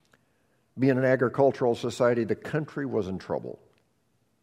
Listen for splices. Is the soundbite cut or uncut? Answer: uncut